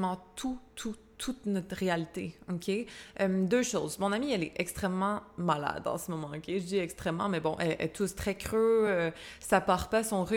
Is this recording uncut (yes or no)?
yes